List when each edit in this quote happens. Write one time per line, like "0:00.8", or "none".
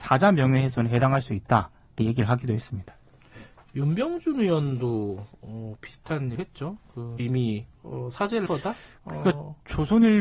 0:02.0
0:06.3
0:07.2
0:07.8
0:08.5